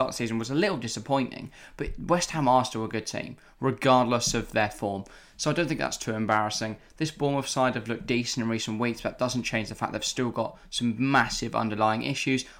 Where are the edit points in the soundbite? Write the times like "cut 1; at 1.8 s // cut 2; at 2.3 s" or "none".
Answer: none